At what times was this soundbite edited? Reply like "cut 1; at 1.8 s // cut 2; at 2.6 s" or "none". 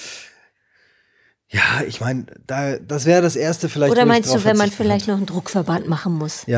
none